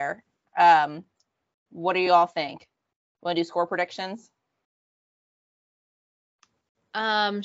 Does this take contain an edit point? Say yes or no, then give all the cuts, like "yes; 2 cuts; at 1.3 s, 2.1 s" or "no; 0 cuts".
no; 0 cuts